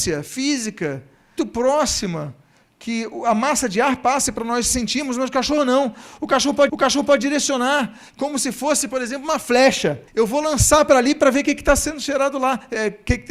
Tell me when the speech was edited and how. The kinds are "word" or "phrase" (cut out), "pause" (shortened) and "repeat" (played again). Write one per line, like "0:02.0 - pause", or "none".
0:01.4 - word
0:06.7 - repeat
0:10.1 - pause